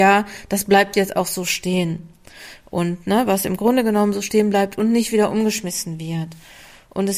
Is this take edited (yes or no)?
no